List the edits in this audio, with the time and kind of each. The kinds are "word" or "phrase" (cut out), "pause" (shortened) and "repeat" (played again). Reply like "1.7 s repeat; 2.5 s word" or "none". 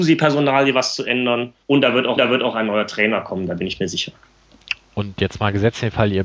1.6 s pause; 2.2 s repeat